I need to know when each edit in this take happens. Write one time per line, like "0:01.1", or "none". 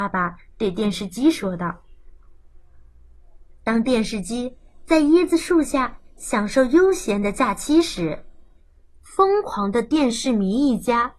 none